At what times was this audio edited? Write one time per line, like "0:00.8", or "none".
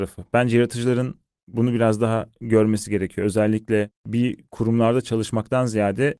none